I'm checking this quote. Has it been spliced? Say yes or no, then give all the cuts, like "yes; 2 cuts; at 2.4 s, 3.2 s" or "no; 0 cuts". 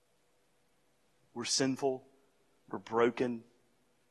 no; 0 cuts